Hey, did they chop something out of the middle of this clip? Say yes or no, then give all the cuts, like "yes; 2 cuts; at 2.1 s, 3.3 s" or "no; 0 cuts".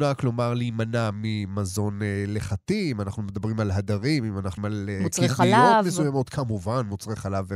yes; 1 cut; at 4.6 s